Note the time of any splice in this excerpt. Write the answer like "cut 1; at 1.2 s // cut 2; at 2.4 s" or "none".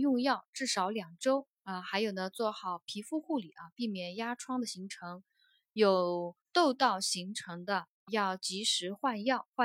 cut 1; at 1.5 s // cut 2; at 6.4 s // cut 3; at 8.1 s